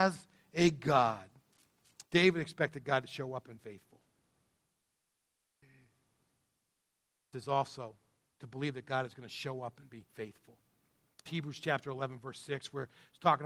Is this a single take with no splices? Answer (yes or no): no